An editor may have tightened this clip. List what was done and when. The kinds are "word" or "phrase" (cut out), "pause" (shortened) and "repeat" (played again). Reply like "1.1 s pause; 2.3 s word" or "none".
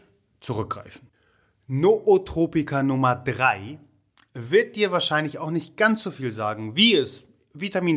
none

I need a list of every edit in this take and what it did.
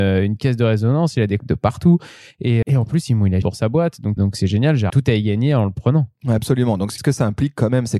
1.4 s word; 2.6 s word; 3.4 s word; 4.2 s word; 4.9 s word; 7.0 s word

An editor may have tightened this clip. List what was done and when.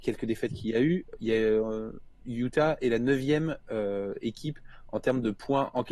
none

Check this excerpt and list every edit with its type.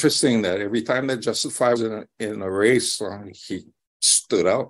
1.8 s word

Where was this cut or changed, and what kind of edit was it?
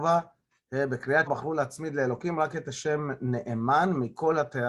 1.3 s word

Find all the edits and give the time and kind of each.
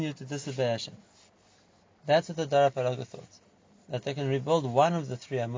none

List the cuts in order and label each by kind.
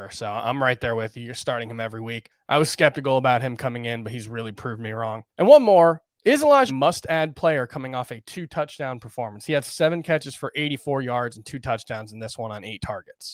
6.7 s phrase

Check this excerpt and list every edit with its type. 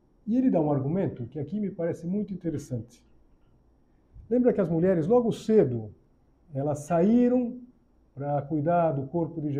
none

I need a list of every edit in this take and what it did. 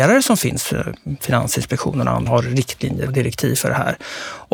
1.2 s word; 2.3 s word; 3.1 s word

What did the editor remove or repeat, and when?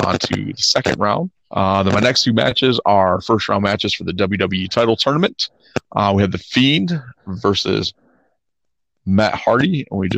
1.4 s pause

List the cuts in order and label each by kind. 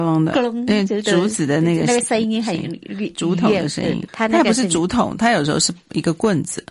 4.1 s word

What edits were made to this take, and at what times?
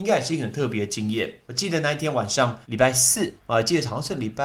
1.4 s pause; 2.6 s pause; 3.4 s pause

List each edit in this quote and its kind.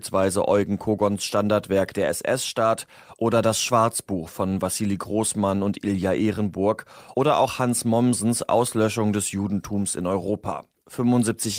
none

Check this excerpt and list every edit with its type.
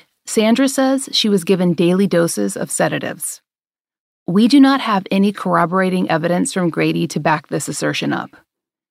none

